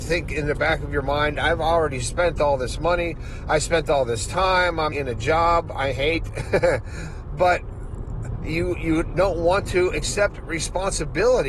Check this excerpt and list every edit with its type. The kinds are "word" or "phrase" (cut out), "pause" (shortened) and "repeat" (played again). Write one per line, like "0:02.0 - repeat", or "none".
0:04.9 - word